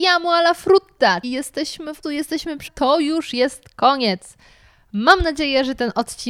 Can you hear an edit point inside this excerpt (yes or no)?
yes